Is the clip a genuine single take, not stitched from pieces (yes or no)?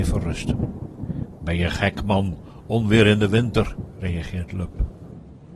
yes